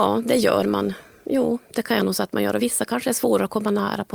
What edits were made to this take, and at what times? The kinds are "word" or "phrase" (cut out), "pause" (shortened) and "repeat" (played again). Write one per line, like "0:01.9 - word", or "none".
none